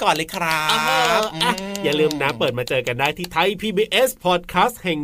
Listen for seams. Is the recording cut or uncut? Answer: uncut